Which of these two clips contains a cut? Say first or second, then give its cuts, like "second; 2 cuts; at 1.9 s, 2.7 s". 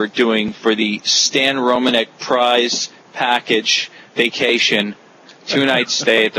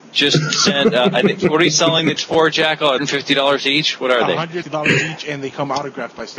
second; 3 cuts; at 2.2 s, 3.0 s, 4.6 s